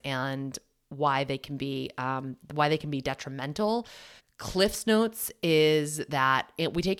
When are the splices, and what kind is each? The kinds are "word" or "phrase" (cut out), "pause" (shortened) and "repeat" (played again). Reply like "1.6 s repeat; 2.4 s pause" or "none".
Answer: 4.2 s pause